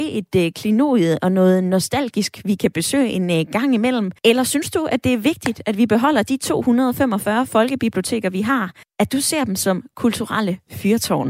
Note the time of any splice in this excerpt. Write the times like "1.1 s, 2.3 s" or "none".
4.2 s, 8.8 s